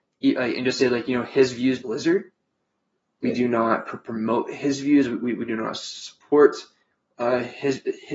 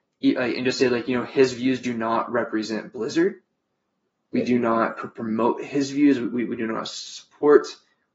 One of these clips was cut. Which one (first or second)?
first